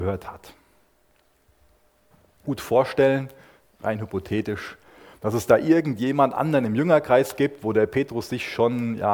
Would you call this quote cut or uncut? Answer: cut